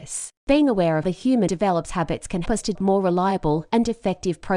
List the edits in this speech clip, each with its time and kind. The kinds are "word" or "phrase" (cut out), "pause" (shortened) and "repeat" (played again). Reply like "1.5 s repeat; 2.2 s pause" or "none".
1.0 s word; 1.5 s word; 2.4 s word; 2.7 s word